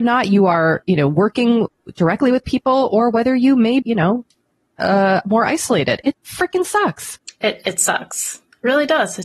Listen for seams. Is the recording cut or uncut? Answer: cut